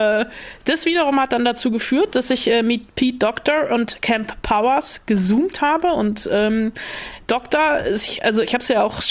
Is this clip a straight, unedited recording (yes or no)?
yes